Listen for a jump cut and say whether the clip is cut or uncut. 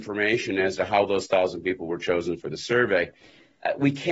uncut